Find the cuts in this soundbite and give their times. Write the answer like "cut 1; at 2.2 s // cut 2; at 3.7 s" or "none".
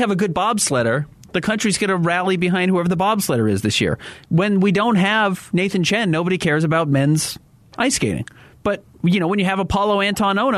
none